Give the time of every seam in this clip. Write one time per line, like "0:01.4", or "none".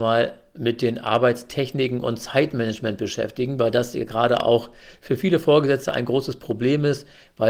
none